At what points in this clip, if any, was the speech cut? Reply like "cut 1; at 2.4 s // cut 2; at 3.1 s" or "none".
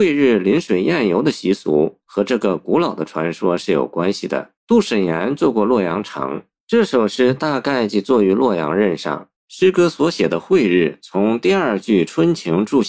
cut 1; at 4.6 s // cut 2; at 6.6 s // cut 3; at 9.4 s